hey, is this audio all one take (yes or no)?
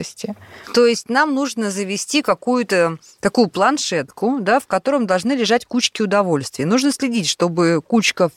yes